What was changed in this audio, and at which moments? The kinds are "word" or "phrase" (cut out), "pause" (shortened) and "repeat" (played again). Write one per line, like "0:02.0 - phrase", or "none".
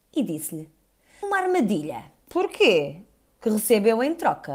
0:01.2 - word
0:02.2 - pause